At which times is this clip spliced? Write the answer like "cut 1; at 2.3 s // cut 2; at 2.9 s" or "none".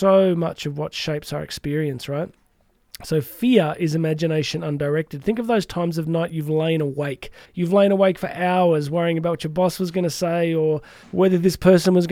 cut 1; at 7.4 s // cut 2; at 11.0 s

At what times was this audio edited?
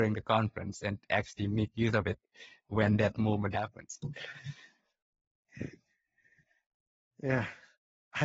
cut 1; at 3.5 s

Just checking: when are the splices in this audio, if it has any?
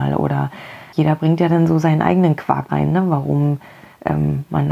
cut 1; at 0.9 s // cut 2; at 2.7 s

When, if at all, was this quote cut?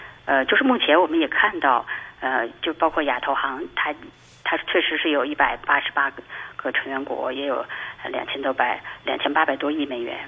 none

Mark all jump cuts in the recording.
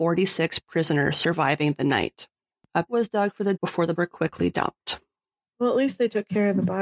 cut 1; at 2.9 s // cut 2; at 3.6 s // cut 3; at 4.0 s

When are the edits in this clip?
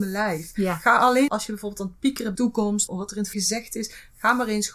cut 1; at 1.3 s // cut 2; at 2.4 s // cut 3; at 2.9 s // cut 4; at 3.3 s

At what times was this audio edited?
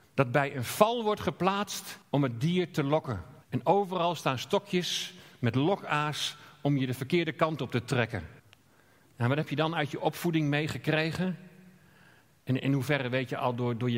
cut 1; at 2.0 s // cut 2; at 3.4 s // cut 3; at 8.4 s

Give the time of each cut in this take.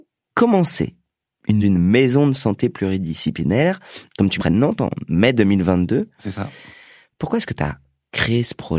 cut 1; at 1.6 s // cut 2; at 4.4 s

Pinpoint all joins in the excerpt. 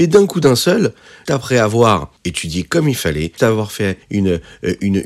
cut 1; at 1.3 s // cut 2; at 2.2 s // cut 3; at 3.4 s // cut 4; at 4.0 s

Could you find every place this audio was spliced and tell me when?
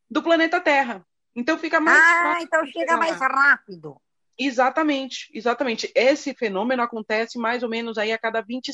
none

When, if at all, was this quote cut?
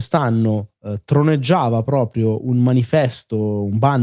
none

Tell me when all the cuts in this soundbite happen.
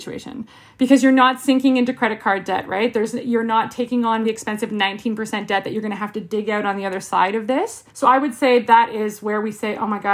cut 1; at 4.2 s // cut 2; at 7.9 s

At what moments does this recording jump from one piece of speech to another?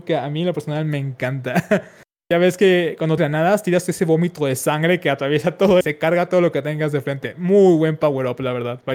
cut 1; at 3.2 s // cut 2; at 5.8 s

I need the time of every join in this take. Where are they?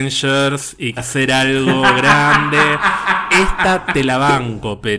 cut 1; at 1.0 s

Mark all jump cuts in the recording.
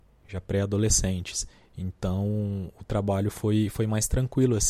none

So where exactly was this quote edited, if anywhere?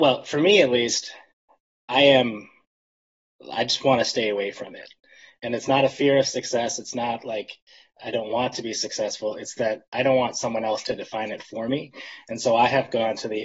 none

